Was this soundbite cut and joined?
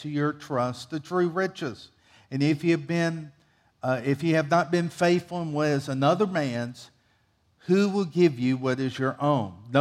no; 0 cuts

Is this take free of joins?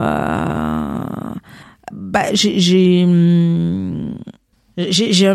no; 1 cut; at 1.9 s

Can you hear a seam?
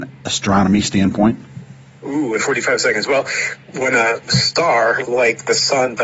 yes; 3 cuts; at 2.4 s, 3.7 s, 5.0 s

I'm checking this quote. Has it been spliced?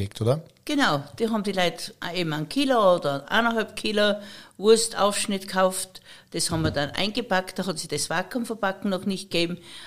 no; 0 cuts

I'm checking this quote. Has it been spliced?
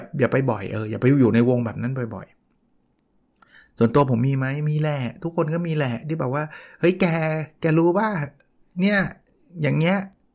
no; 0 cuts

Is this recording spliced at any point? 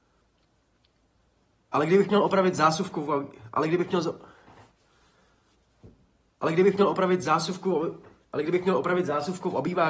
no; 0 cuts

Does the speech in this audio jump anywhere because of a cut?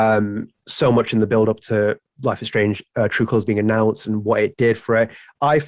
no; 0 cuts

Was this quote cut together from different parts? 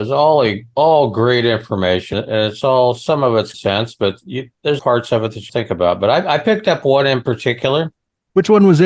yes; 4 cuts; at 2.1 s, 3.5 s, 4.8 s, 5.5 s

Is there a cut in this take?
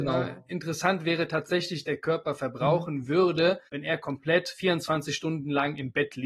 yes; 2 cuts; at 1.8 s, 3.7 s

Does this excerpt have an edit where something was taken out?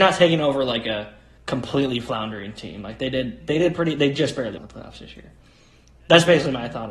yes; 2 cuts; at 1.4 s, 4.6 s

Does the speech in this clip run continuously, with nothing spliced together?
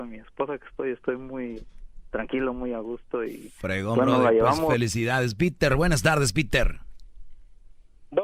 yes; 0 cuts

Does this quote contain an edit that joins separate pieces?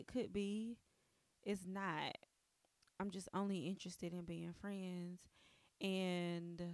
no; 0 cuts

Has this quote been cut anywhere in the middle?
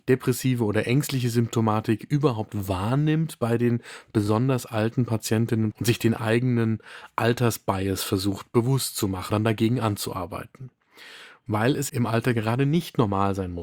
yes; 3 cuts; at 5.7 s, 9.3 s, 11.9 s

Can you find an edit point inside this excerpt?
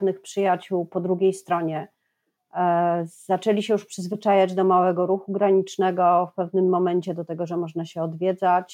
no; 0 cuts

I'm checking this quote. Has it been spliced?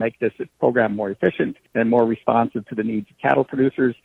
no; 0 cuts

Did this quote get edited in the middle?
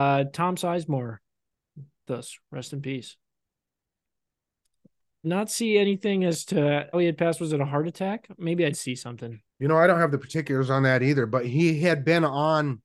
yes; 5 cuts; at 2.1 s, 5.2 s, 6.9 s, 8.7 s, 9.5 s

